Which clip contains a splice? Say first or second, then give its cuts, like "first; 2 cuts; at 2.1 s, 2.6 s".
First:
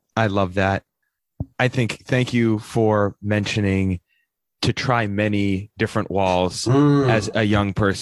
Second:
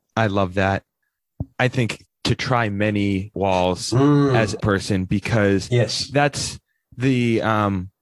second; 3 cuts; at 2.1 s, 3.3 s, 4.6 s